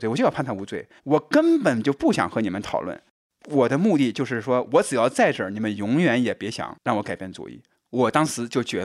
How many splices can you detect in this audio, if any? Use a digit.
2